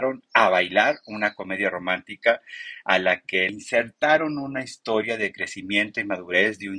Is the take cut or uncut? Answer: cut